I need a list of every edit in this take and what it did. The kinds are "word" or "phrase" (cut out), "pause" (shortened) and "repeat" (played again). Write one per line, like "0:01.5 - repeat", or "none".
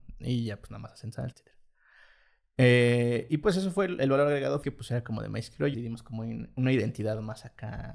0:01.3 - word
0:04.6 - word
0:05.7 - word